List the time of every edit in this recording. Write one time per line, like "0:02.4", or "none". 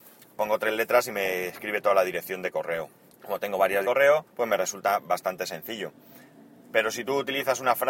0:03.1
0:03.8
0:04.3